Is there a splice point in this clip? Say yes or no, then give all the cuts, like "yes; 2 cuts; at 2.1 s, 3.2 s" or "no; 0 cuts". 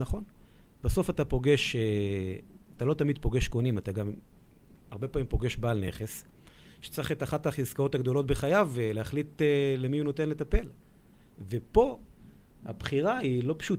no; 0 cuts